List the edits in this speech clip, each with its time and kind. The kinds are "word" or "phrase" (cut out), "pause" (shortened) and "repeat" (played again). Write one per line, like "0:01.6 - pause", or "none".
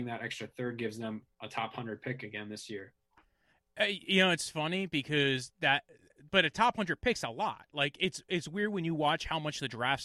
none